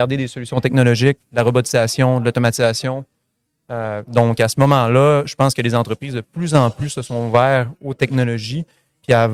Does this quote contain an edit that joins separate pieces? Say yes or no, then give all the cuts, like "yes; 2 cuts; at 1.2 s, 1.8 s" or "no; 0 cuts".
no; 0 cuts